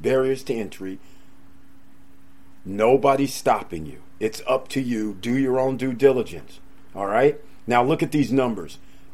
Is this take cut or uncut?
uncut